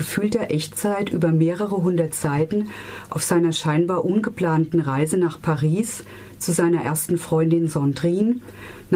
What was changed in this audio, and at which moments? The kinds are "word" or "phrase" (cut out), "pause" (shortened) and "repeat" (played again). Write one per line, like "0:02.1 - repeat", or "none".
none